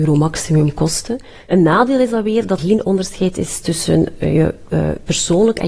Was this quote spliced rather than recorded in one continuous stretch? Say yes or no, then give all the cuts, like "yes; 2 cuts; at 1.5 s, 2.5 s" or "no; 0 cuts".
yes; 1 cut; at 2.6 s